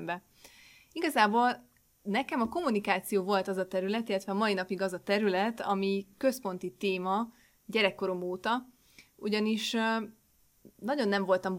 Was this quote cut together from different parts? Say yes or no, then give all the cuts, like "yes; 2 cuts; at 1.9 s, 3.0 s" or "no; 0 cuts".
no; 0 cuts